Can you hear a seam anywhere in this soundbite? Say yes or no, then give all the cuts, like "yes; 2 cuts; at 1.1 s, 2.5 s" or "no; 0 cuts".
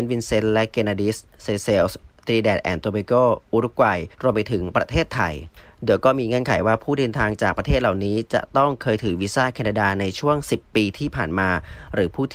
yes; 1 cut; at 4.1 s